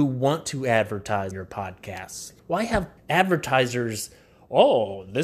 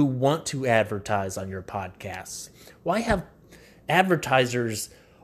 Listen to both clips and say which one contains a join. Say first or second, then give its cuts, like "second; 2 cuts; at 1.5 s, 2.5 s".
first; 3 cuts; at 1.3 s, 2.4 s, 3.0 s